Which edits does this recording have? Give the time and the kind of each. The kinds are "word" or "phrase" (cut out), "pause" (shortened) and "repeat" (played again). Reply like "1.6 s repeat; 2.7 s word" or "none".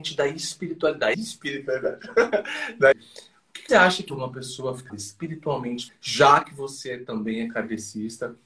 1.1 s word; 2.9 s word; 3.7 s word; 4.1 s word; 4.9 s word; 5.9 s word